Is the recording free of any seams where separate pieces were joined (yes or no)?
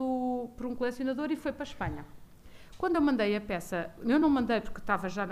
yes